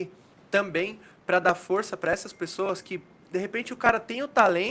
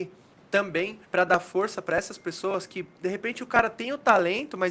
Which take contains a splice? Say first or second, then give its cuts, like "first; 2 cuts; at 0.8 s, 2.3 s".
second; 2 cuts; at 1.0 s, 3.0 s